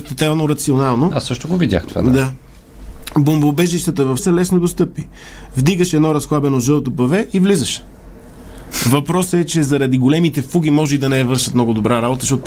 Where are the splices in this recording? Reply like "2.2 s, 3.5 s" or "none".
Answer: 4.2 s